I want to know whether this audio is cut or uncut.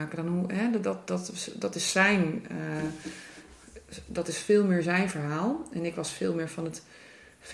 uncut